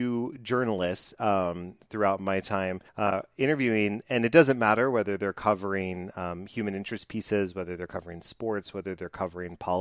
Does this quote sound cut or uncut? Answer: cut